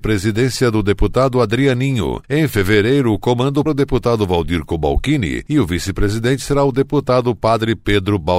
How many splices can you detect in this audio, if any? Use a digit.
1